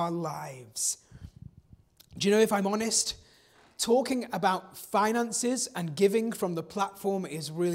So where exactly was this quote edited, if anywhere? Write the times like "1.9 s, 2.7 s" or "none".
none